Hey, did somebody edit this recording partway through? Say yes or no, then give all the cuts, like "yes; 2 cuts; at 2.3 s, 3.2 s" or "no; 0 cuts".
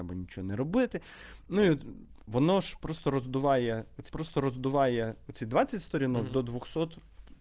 yes; 1 cut; at 4.1 s